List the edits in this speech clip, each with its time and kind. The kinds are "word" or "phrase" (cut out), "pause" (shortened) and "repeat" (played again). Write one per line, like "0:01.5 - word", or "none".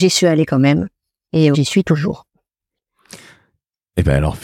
0:01.5 - word